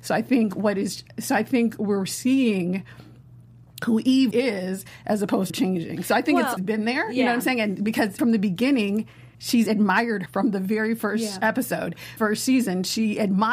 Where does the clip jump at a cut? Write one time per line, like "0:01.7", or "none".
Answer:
0:04.3
0:05.5
0:06.6
0:08.2
0:09.3
0:10.3
0:12.2